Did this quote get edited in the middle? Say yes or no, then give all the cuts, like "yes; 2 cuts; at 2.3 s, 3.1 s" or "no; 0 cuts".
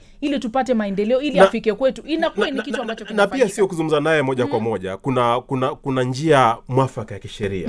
no; 0 cuts